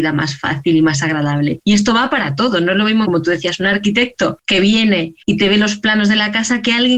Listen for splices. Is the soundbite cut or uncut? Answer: cut